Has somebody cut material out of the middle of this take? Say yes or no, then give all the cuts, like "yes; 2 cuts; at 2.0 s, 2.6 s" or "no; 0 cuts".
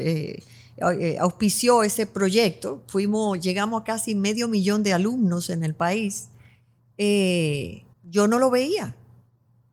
yes; 1 cut; at 7.9 s